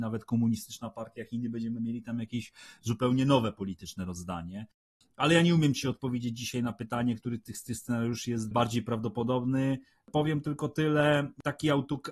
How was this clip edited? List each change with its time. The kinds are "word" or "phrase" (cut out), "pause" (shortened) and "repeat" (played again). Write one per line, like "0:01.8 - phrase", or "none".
0:08.5 - word